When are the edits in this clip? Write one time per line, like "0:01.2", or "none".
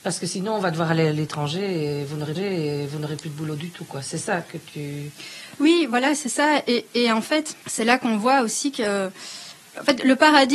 0:02.3
0:07.6